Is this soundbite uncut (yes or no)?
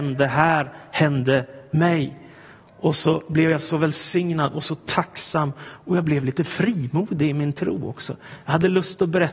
yes